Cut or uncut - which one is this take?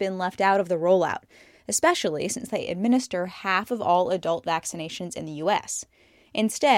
uncut